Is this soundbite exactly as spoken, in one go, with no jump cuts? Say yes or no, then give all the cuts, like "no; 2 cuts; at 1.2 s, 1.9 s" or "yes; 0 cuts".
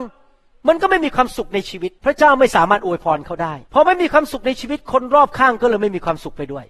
no; 2 cuts; at 2.0 s, 3.6 s